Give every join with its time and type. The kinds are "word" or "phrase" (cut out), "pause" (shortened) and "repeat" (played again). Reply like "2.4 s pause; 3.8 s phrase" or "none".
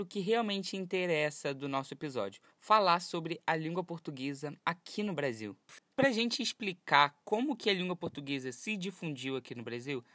2.5 s pause; 4.6 s pause